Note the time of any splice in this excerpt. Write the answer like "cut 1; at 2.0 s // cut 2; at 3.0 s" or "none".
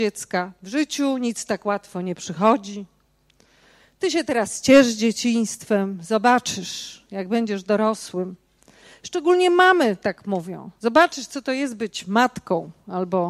none